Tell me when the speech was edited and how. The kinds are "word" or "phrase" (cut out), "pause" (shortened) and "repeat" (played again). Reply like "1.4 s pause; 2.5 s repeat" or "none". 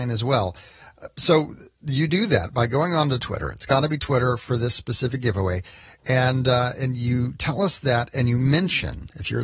none